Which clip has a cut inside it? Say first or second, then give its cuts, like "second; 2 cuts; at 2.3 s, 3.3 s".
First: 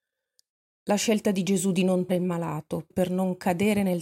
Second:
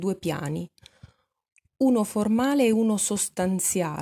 first; 2 cuts; at 2.1 s, 2.9 s